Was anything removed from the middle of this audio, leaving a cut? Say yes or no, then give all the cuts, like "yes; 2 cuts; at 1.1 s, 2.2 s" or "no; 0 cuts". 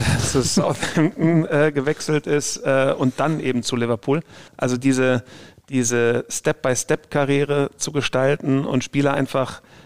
yes; 1 cut; at 4.5 s